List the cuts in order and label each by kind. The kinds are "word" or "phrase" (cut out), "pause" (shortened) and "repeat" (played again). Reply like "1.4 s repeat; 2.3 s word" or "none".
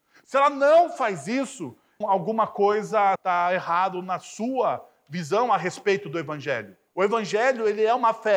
2.0 s word; 3.2 s word; 6.9 s pause